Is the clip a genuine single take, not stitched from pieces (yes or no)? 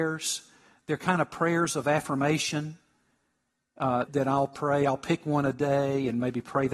no